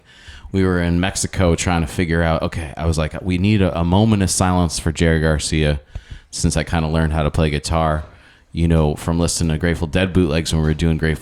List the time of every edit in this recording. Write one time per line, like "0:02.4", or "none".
none